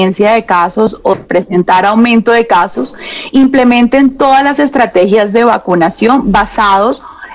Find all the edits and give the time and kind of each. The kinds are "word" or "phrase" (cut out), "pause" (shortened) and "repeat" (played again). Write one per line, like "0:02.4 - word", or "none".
0:01.1 - word